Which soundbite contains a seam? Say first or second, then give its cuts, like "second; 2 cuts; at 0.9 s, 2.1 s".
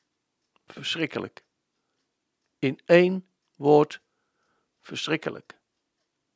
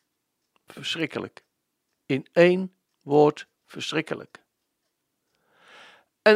second; 2 cuts; at 1.7 s, 3.5 s